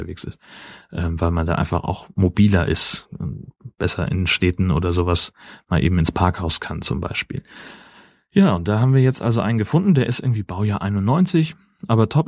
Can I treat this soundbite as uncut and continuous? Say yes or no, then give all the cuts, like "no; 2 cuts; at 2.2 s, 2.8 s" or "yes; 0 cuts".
yes; 0 cuts